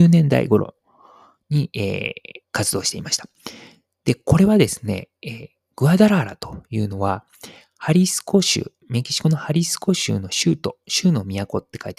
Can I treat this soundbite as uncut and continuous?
no; 1 cut; at 2.4 s

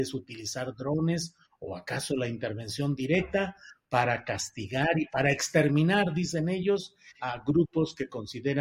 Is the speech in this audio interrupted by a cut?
yes; 1 cut; at 7.2 s

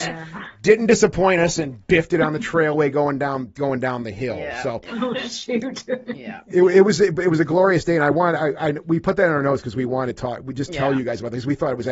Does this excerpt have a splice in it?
no; 0 cuts

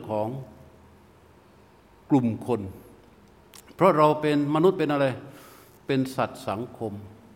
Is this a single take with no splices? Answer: yes; 0 cuts

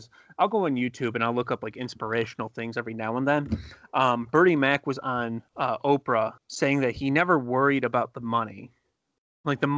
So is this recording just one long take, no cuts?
no; 2 cuts; at 5.5 s, 6.4 s

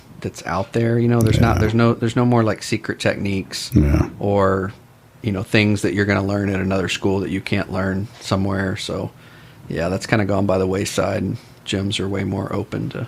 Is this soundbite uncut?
yes; 0 cuts

